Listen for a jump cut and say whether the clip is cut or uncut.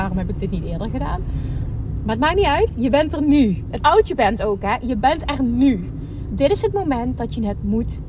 cut